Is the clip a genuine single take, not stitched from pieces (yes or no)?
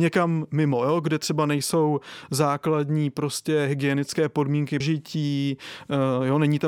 no